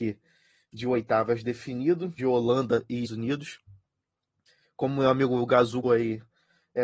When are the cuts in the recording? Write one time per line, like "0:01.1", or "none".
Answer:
0:02.2
0:03.0
0:05.8